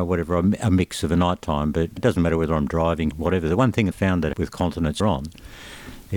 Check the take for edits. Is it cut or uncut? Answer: cut